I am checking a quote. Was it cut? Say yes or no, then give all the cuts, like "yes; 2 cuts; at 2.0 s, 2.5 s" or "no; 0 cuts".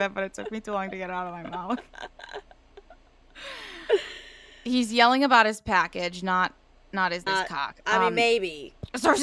yes; 1 cut; at 7.3 s